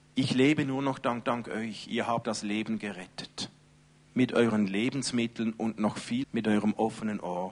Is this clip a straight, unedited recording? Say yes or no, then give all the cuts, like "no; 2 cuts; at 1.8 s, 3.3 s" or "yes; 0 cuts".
no; 4 cuts; at 1.2 s, 2.2 s, 3.9 s, 6.2 s